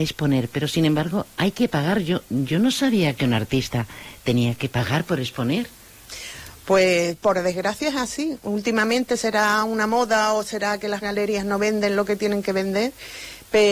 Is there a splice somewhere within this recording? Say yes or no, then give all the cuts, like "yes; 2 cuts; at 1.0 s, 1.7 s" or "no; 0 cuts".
yes; 1 cut; at 7.2 s